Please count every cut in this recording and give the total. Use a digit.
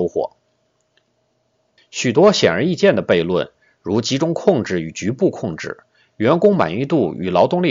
0